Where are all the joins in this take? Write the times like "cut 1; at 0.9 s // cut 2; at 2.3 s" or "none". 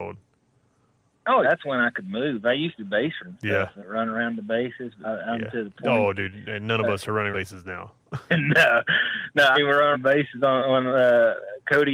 cut 1; at 1.4 s // cut 2; at 2.8 s // cut 3; at 3.2 s // cut 4; at 3.8 s // cut 5; at 5.0 s // cut 6; at 7.3 s // cut 7; at 8.3 s // cut 8; at 9.5 s // cut 9; at 9.9 s